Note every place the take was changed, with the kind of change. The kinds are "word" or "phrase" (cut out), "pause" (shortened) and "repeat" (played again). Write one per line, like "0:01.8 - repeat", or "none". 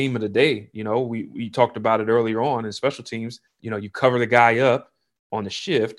0:03.5 - pause